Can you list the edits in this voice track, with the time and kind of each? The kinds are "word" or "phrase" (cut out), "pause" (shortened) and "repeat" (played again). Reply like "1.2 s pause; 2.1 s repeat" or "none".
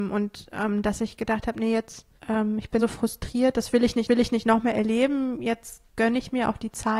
2.2 s pause; 2.8 s word; 4.1 s repeat; 5.9 s pause